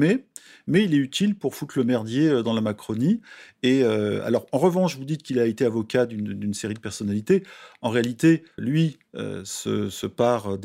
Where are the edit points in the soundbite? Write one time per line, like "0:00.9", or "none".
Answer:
0:08.6